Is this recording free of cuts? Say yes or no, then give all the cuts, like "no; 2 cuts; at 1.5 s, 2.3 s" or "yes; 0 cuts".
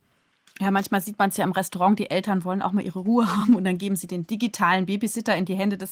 yes; 0 cuts